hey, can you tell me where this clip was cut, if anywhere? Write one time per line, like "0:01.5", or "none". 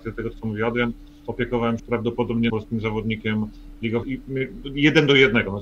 0:01.8
0:02.5
0:04.0